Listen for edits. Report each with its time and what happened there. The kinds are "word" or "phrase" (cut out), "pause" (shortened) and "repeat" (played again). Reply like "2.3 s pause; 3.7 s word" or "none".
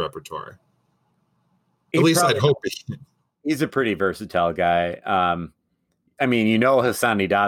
none